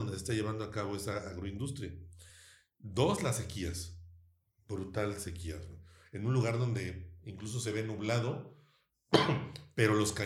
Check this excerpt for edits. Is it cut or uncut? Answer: uncut